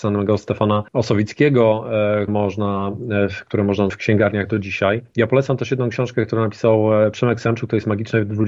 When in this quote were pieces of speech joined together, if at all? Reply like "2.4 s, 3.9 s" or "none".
2.3 s, 3.9 s